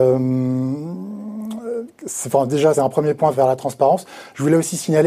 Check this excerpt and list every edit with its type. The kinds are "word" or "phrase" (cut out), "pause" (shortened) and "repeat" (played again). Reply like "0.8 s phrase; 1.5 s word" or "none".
2.7 s word; 3.3 s word